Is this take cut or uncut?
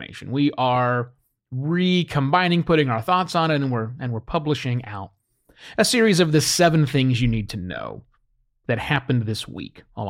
uncut